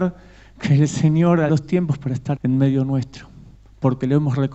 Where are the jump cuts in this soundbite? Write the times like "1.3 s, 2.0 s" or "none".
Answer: 1.5 s, 2.4 s